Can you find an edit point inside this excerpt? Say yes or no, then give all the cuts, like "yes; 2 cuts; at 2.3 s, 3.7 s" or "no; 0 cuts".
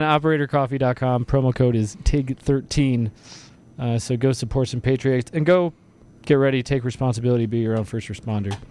no; 0 cuts